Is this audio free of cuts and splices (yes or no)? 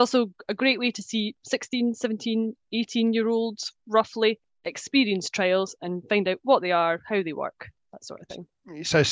yes